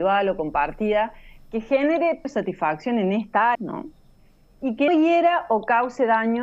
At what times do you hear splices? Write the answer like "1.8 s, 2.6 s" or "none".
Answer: 2.2 s, 3.5 s, 4.9 s